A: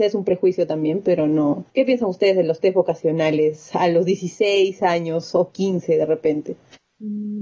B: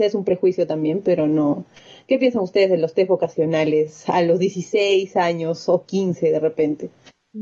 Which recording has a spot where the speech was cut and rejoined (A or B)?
A